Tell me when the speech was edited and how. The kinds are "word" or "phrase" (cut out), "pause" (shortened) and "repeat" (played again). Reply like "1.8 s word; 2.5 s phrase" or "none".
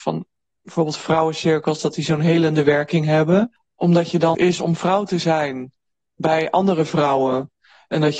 4.3 s phrase